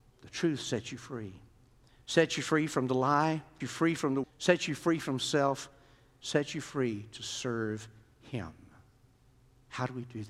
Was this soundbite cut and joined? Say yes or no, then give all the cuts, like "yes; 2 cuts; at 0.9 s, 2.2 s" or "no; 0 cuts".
yes; 2 cuts; at 3.6 s, 4.2 s